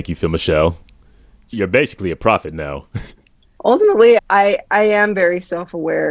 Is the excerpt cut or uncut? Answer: cut